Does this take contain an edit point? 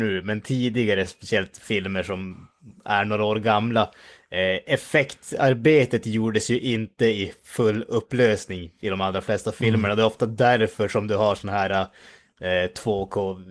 no; 0 cuts

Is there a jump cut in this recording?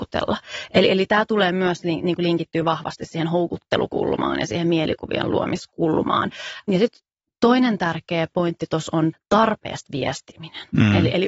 no; 0 cuts

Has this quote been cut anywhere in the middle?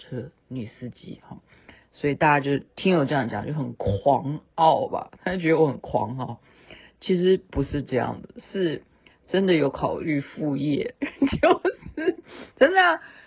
no; 0 cuts

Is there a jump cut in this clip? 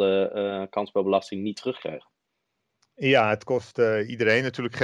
no; 0 cuts

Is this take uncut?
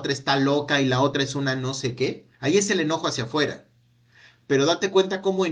no; 1 cut; at 2.3 s

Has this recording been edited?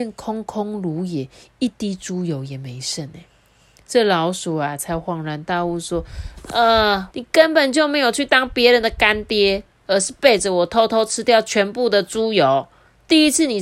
yes; 1 cut; at 7.1 s

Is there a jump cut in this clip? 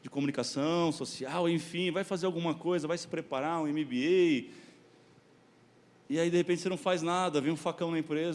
no; 0 cuts

